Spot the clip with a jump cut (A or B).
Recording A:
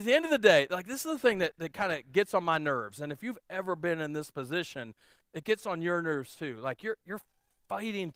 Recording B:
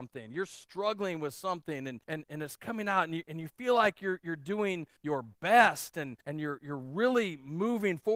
B